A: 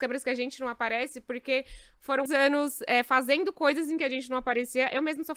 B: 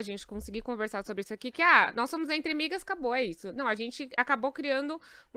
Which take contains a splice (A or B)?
A